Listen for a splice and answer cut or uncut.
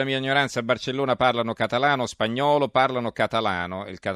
uncut